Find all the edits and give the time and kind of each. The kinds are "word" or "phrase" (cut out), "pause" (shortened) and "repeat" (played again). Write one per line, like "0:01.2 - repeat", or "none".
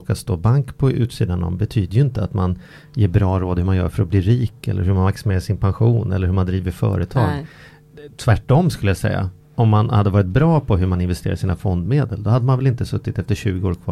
none